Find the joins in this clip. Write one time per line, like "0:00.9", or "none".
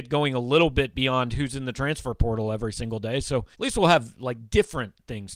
0:03.5